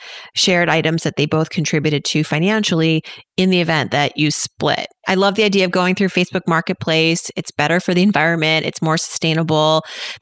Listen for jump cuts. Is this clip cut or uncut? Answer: uncut